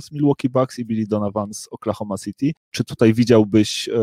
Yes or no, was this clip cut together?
no